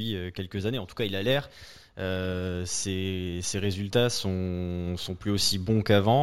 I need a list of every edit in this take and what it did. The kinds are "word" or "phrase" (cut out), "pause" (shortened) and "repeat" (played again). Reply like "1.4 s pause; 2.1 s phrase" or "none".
none